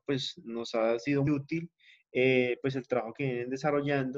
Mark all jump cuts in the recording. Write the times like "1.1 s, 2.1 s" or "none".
1.3 s